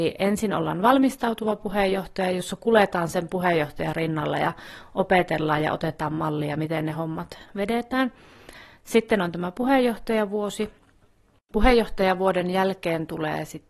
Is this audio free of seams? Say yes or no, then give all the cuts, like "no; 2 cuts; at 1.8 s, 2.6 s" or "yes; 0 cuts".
yes; 0 cuts